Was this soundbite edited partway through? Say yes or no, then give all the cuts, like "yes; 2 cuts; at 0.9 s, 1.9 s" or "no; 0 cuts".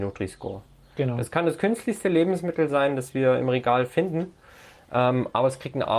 no; 0 cuts